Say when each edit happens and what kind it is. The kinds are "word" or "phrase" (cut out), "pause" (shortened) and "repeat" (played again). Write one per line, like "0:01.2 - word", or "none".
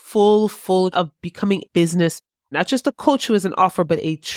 0:00.9 - word
0:01.6 - word
0:02.5 - word